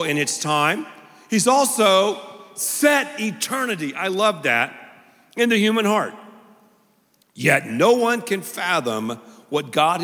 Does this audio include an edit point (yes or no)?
no